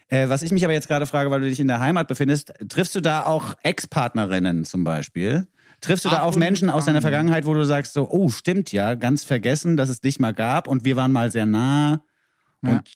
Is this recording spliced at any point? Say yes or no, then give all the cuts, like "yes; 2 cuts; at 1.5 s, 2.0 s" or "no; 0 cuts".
no; 0 cuts